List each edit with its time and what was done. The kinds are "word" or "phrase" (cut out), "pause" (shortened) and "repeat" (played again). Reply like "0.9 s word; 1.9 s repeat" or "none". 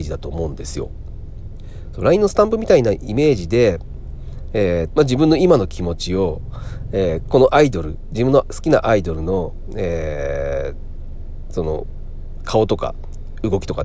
4.9 s word

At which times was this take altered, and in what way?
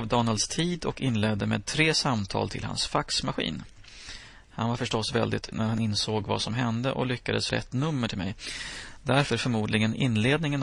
5.5 s word; 7.5 s word; 9.3 s word

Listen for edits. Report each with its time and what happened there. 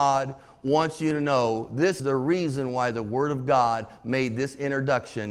2.0 s word

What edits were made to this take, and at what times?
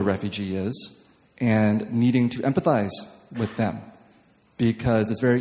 none

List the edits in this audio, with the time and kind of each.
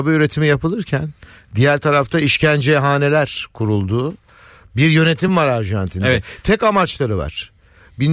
none

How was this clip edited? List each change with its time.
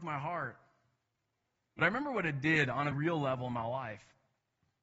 2.9 s word

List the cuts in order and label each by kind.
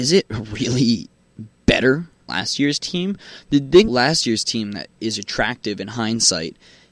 2.3 s word; 3.9 s word

